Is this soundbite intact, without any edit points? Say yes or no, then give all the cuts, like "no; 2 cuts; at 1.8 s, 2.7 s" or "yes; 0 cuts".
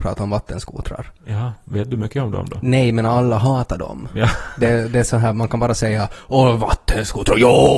yes; 0 cuts